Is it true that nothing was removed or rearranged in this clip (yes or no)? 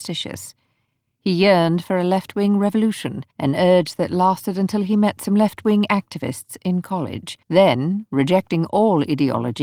no